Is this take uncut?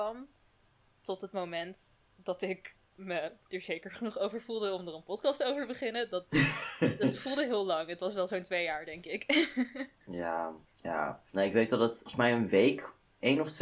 no; 2 cuts; at 2.0 s, 10.6 s

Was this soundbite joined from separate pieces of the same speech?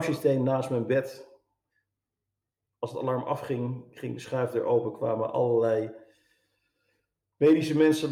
no; 0 cuts

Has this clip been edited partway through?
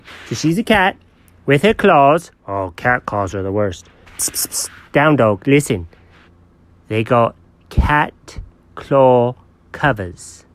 no; 0 cuts

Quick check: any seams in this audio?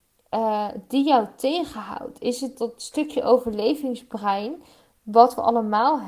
yes; 1 cut; at 2.5 s

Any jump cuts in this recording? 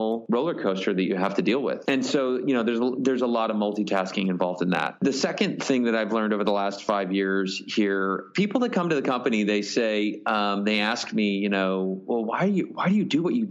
no; 0 cuts

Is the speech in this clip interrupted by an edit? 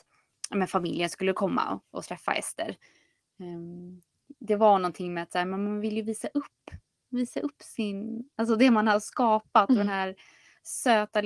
no; 0 cuts

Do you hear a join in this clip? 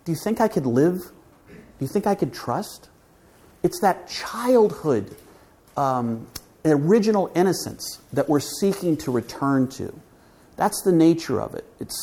no; 0 cuts

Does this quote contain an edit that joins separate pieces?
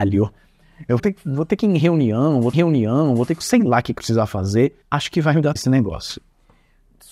yes; 6 cuts; at 1.0 s, 2.5 s, 3.4 s, 4.0 s, 4.8 s, 5.6 s

